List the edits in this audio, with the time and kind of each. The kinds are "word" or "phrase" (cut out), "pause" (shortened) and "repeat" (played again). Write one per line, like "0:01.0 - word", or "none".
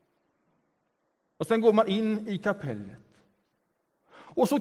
none